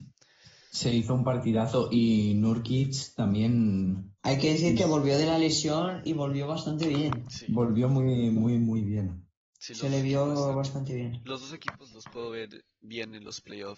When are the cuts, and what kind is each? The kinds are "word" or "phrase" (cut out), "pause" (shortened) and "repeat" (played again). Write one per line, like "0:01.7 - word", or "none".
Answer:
0:04.2 - pause